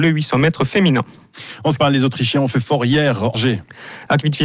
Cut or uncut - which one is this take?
cut